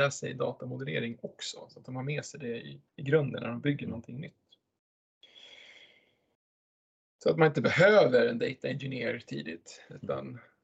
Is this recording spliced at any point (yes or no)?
yes